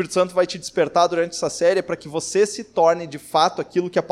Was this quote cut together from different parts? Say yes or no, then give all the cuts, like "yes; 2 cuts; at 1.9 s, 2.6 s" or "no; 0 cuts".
no; 0 cuts